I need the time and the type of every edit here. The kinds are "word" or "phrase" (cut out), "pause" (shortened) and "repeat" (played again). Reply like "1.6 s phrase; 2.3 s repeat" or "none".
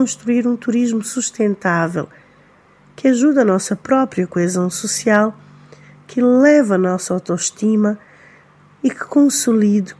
none